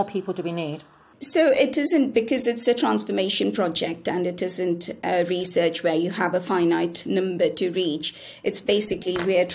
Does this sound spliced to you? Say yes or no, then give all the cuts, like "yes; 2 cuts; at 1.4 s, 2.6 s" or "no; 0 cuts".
no; 0 cuts